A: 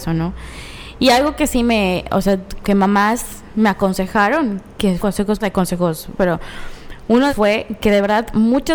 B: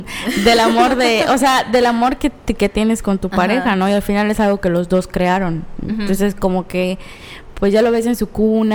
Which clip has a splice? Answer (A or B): A